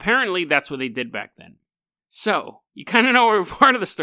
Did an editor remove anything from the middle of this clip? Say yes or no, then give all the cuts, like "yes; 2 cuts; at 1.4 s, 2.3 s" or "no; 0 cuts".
yes; 1 cut; at 2.7 s